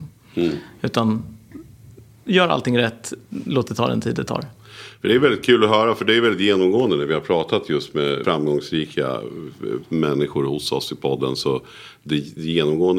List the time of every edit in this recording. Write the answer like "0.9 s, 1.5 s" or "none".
8.2 s